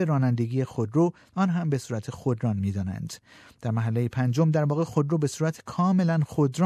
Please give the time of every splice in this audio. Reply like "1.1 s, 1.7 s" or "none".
none